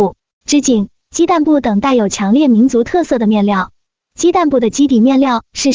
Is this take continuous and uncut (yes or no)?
yes